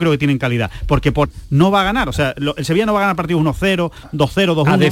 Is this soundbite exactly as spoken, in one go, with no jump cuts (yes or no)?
no